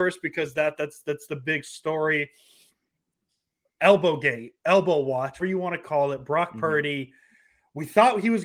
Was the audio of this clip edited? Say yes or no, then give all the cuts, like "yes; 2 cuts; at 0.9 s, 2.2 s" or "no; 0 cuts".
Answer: yes; 1 cut; at 5.4 s